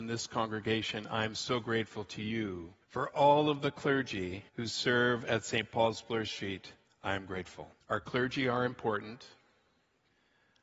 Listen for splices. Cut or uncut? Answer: cut